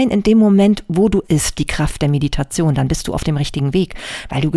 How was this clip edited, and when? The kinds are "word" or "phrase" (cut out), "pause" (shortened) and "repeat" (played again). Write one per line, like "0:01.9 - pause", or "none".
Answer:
0:01.2 - phrase
0:01.5 - word

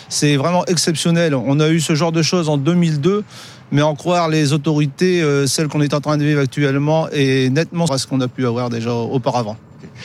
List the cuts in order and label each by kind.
0:07.9 - word

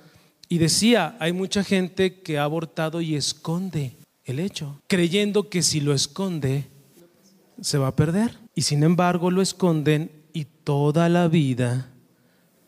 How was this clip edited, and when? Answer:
0:04.0 - pause
0:04.8 - pause
0:06.9 - pause
0:08.5 - pause

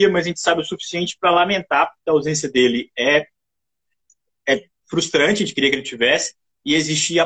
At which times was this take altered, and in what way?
none

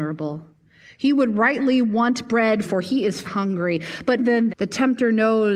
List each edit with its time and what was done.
0:02.6 - phrase
0:03.2 - word
0:04.2 - word
0:04.5 - word

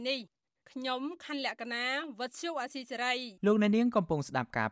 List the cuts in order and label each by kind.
0:03.4 - pause

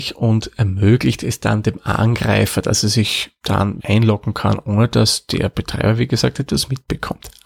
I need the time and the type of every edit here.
0:03.8 - word

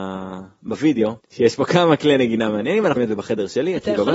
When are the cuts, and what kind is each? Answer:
0:01.2 - pause
0:03.0 - word

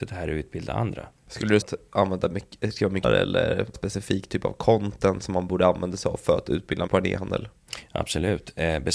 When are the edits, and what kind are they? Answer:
0:01.2 - pause
0:01.6 - word
0:03.0 - word
0:03.7 - word
0:06.9 - word

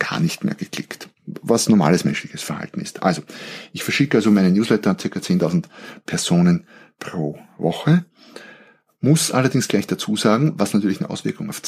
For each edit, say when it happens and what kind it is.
none

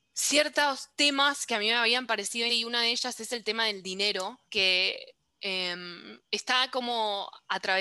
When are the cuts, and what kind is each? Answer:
0:02.5 - word
0:04.5 - pause
0:06.2 - pause

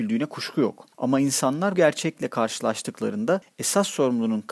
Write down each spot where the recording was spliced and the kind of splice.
0:00.9 - pause
0:01.7 - word

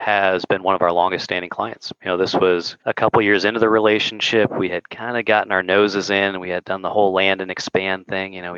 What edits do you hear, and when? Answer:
0:02.8 - pause

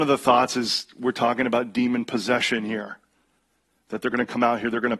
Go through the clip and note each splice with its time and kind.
none

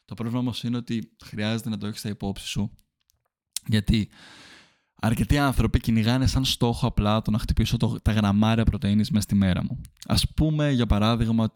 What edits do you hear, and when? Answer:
none

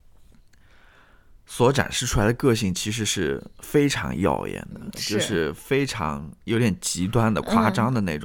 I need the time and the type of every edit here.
none

